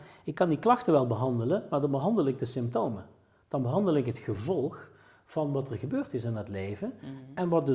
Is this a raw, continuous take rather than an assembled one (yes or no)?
yes